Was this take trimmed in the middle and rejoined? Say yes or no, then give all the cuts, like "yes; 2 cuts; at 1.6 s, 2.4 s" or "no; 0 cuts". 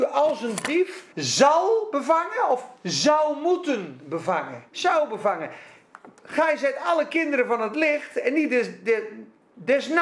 yes; 2 cuts; at 1.1 s, 4.7 s